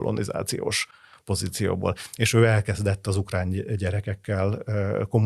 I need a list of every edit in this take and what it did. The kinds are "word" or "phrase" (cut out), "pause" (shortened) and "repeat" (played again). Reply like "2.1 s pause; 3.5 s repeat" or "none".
none